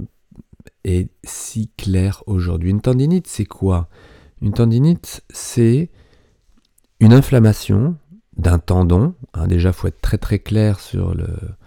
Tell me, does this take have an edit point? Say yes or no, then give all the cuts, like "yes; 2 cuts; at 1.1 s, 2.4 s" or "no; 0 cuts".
no; 0 cuts